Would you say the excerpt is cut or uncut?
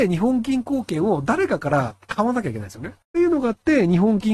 cut